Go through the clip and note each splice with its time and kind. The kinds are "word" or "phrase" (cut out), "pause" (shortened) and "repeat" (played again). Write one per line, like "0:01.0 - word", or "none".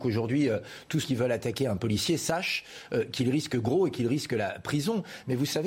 0:01.0 - word